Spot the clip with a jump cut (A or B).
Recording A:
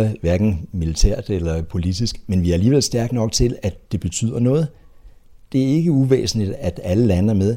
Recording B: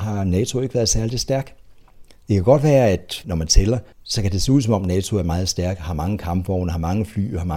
B